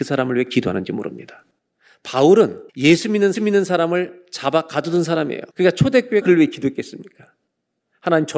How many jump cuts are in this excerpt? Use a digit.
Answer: 4